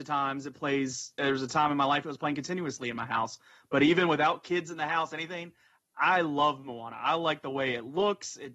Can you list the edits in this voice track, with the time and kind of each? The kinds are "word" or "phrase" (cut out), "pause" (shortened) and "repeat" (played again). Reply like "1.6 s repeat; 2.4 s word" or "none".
none